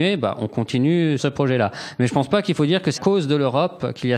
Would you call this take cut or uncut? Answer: cut